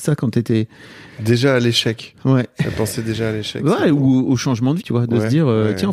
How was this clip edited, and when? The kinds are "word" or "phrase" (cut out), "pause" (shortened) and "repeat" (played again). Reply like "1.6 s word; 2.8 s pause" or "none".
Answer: 1.1 s pause; 4.8 s word